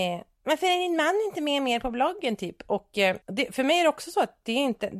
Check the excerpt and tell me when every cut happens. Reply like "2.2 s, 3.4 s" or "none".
3.2 s